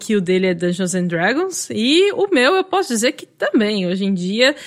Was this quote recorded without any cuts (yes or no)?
yes